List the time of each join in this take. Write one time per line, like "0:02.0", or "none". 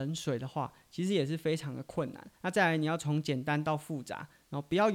0:02.3